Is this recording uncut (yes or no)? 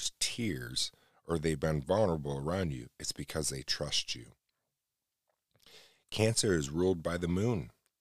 yes